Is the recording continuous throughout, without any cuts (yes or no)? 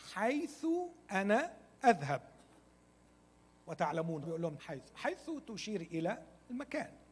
no